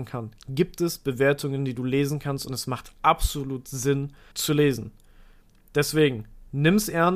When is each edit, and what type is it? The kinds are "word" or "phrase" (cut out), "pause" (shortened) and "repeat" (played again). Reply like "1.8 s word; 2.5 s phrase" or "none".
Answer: 4.3 s word